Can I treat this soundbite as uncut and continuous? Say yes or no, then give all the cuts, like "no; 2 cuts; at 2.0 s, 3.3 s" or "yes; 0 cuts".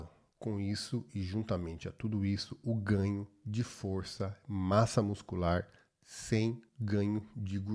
no; 1 cut; at 6.7 s